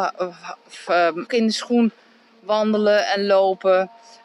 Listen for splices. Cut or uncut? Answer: cut